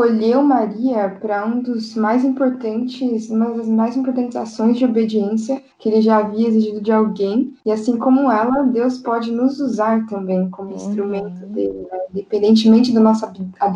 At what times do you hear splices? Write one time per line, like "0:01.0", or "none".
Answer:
0:05.7
0:07.6

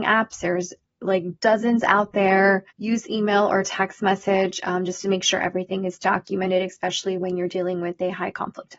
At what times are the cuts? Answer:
0:02.7

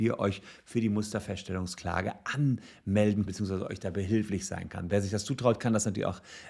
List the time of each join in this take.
0:03.3

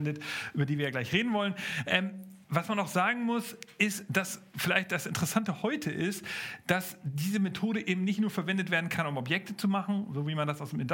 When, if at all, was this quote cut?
0:02.4

